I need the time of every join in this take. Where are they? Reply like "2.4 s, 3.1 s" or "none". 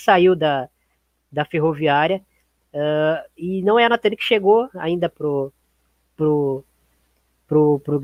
5.1 s